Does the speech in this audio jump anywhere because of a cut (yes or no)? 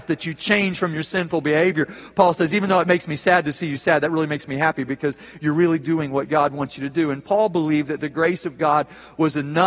no